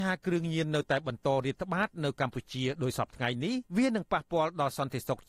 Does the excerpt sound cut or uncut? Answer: cut